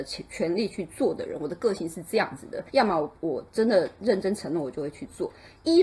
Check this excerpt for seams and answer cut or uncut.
cut